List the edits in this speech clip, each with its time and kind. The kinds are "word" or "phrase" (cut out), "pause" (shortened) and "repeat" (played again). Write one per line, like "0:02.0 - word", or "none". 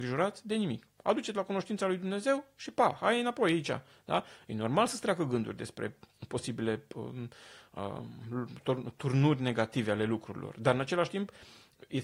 none